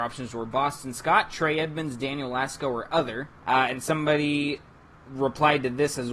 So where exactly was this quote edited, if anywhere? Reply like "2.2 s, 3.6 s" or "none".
3.4 s